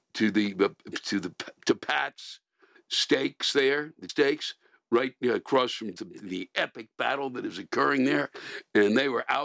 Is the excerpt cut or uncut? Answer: cut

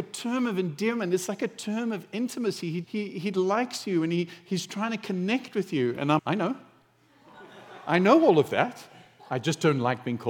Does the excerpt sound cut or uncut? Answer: cut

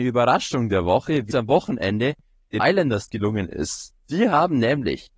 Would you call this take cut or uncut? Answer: cut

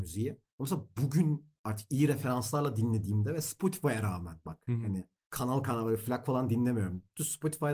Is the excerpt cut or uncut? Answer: uncut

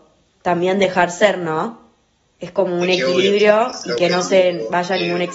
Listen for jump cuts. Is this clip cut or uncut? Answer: uncut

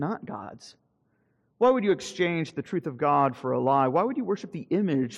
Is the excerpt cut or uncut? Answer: uncut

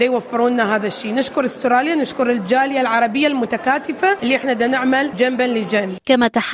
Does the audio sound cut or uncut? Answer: uncut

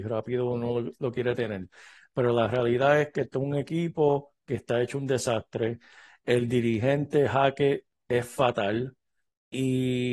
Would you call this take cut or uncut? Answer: uncut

